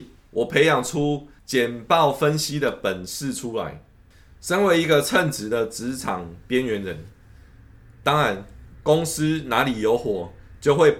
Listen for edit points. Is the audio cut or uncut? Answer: uncut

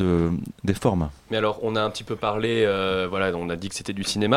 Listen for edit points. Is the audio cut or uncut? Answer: uncut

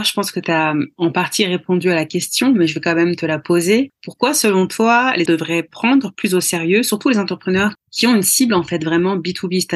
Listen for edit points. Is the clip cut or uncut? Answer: cut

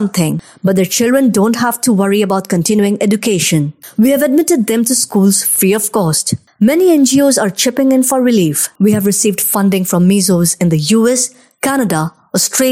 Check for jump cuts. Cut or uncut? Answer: uncut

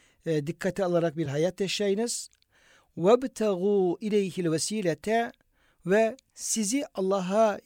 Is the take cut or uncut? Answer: uncut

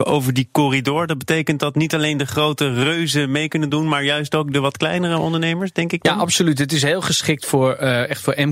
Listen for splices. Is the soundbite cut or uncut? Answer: uncut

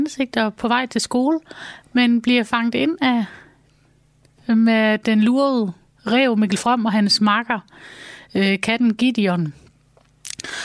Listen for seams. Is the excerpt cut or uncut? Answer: uncut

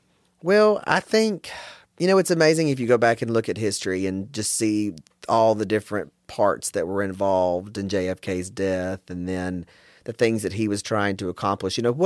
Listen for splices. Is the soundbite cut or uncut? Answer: uncut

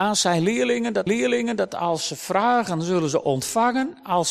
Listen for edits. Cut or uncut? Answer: cut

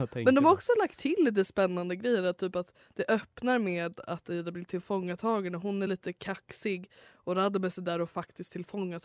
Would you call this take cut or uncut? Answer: uncut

